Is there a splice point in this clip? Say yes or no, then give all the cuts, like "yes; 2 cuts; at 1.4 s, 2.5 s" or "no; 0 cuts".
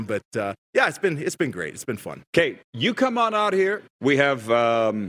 yes; 2 cuts; at 2.3 s, 3.9 s